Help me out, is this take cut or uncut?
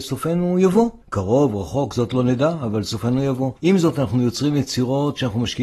cut